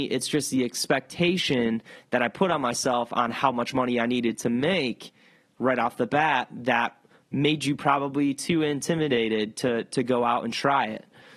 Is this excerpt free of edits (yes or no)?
yes